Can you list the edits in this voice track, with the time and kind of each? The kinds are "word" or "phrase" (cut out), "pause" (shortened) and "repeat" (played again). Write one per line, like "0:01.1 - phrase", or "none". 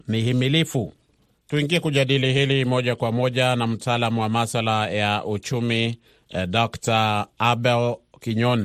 none